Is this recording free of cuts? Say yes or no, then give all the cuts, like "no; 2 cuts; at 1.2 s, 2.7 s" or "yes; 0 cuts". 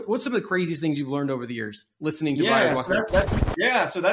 no; 1 cut; at 1.9 s